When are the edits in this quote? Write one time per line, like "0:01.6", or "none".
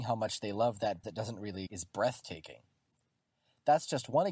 0:01.0
0:01.7